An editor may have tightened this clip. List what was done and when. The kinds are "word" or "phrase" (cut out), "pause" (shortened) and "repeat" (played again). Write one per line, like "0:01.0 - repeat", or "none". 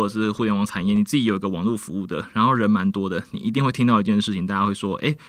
none